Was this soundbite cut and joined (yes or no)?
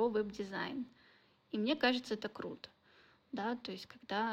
no